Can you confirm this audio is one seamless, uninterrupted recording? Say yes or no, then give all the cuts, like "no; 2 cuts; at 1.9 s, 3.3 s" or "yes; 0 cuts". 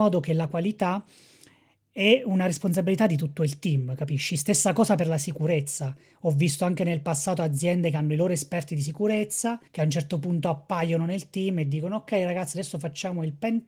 no; 1 cut; at 9.7 s